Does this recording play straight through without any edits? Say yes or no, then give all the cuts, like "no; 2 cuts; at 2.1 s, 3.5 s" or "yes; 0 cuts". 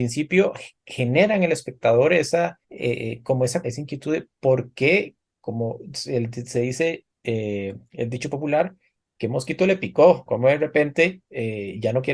no; 3 cuts; at 2.6 s, 3.6 s, 10.3 s